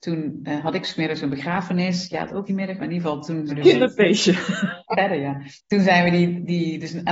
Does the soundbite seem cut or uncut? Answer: cut